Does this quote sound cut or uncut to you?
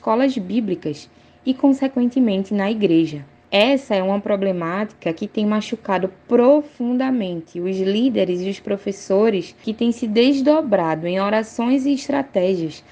uncut